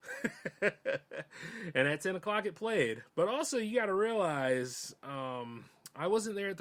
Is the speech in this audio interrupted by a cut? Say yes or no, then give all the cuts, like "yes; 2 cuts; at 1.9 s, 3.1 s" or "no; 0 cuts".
yes; 1 cut; at 3.1 s